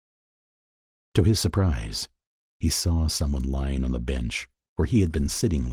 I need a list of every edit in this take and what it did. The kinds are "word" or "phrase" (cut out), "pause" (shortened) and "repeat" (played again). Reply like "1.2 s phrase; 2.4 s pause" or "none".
none